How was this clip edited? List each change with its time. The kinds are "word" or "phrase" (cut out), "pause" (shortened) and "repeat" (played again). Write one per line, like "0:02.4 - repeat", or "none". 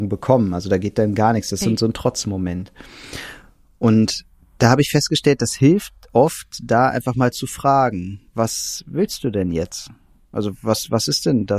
0:08.3 - pause